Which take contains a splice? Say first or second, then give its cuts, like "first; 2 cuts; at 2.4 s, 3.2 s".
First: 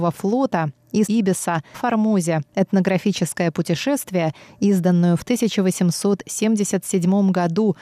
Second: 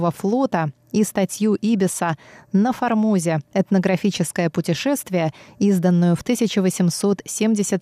first; 2 cuts; at 1.1 s, 1.7 s